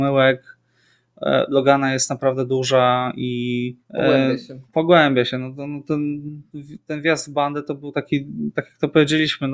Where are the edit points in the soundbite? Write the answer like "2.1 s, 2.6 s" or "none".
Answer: 3.8 s, 4.6 s